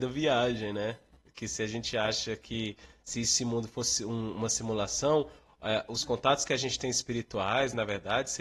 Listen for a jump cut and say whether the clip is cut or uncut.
uncut